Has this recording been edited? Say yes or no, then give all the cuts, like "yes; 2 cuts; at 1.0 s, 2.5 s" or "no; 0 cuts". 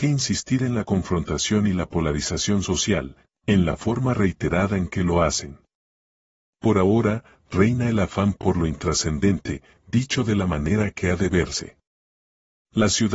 no; 0 cuts